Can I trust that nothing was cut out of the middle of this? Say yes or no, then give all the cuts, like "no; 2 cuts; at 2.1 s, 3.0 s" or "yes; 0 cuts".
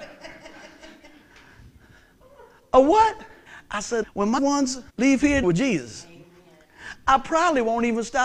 no; 5 cuts; at 3.5 s, 4.0 s, 4.4 s, 4.9 s, 5.4 s